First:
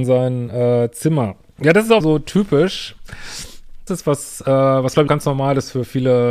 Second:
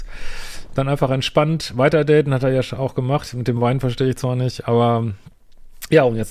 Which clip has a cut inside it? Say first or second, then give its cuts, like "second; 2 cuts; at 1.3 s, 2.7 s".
first; 3 cuts; at 2.0 s, 3.9 s, 5.1 s